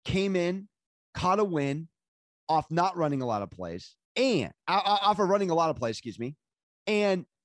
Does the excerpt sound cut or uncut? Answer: cut